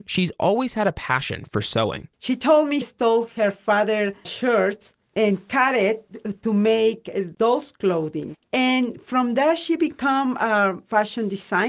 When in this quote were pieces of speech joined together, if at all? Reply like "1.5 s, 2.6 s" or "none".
2.1 s, 2.8 s, 4.2 s